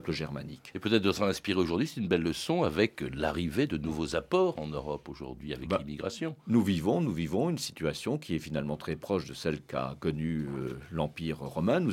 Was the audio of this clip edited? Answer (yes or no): no